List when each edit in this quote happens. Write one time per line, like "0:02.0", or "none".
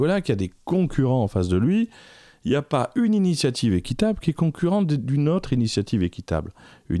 none